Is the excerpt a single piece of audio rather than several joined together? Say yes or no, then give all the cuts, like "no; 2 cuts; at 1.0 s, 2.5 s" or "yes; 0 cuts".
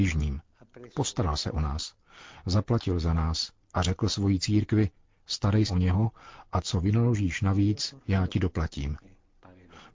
no; 1 cut; at 5.7 s